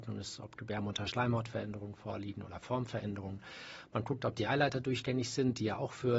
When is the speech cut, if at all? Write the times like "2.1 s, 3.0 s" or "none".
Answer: none